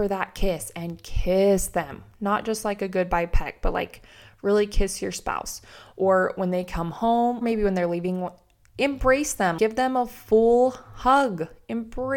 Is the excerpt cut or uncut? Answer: cut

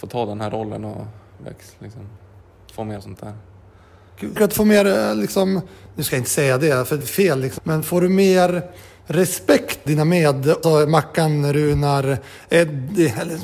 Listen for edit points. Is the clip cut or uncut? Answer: cut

